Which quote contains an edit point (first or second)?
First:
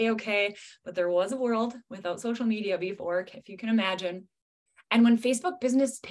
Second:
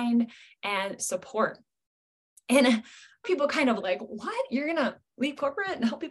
second